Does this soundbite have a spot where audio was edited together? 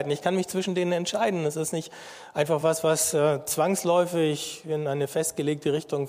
no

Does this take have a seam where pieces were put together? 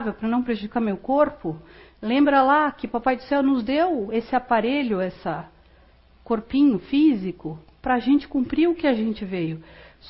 no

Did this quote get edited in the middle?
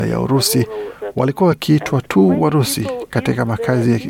no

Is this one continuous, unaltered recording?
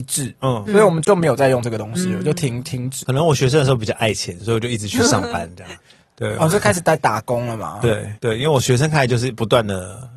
no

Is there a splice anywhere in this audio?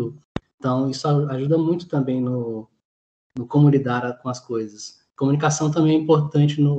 no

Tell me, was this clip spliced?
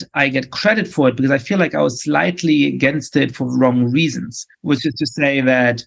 yes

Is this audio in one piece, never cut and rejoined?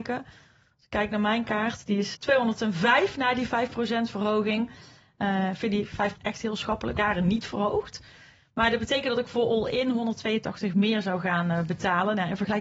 no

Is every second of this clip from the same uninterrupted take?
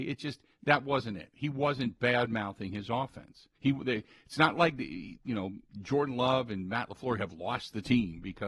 no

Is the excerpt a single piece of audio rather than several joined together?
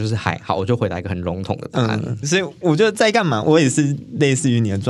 no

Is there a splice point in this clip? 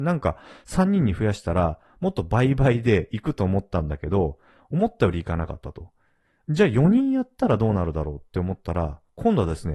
no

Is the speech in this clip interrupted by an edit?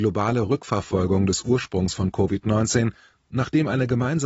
no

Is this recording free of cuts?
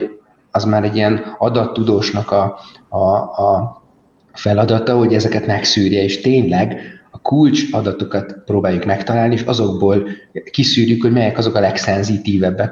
yes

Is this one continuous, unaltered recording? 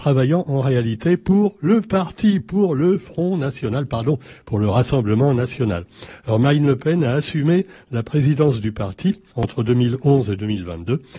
no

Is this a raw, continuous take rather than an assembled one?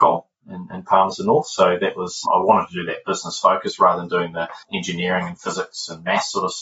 no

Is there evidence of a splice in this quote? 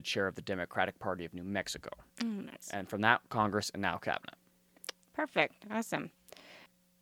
yes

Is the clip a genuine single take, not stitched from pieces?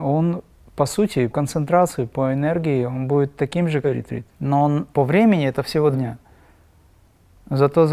no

